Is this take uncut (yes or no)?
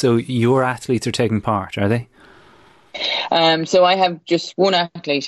yes